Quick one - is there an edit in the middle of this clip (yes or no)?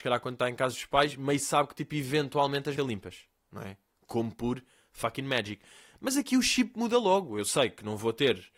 yes